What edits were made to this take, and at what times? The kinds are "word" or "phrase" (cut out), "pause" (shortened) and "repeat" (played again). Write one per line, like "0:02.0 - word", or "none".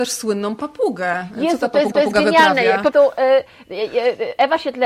0:01.9 - repeat
0:02.9 - word